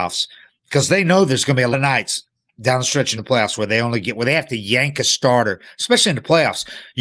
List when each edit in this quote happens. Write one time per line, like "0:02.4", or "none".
0:01.7
0:03.2